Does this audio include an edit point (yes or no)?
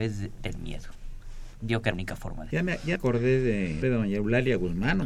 yes